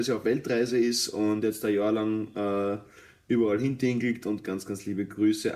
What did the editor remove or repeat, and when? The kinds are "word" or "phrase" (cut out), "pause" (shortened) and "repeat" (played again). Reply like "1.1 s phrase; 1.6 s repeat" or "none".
none

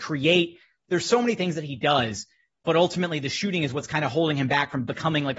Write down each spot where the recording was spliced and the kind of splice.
none

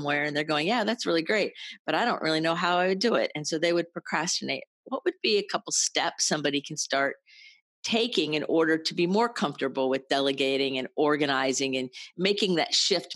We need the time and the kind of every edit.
none

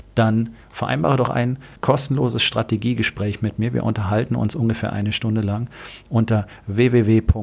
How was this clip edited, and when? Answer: 1.3 s word; 1.8 s pause

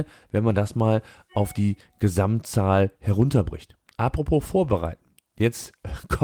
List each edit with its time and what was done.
none

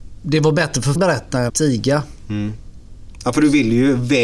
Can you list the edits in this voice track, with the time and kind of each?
1.0 s word; 1.5 s word

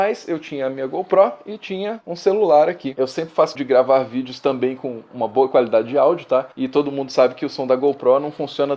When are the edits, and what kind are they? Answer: 3.5 s word; 6.5 s pause

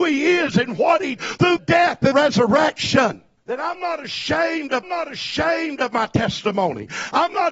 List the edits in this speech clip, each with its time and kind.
1.2 s word; 1.6 s word; 2.1 s word; 3.4 s pause; 4.8 s repeat

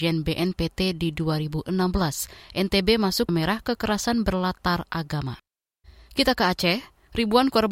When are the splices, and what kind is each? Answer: 3.3 s word

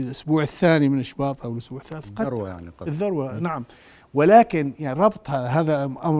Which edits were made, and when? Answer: none

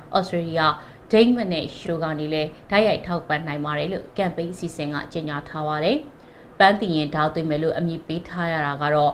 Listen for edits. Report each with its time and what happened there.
1.8 s word

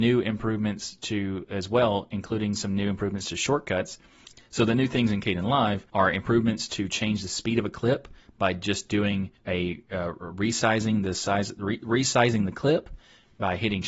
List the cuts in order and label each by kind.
5.9 s pause; 9.4 s pause

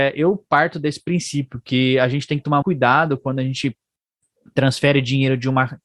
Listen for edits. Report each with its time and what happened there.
2.6 s word

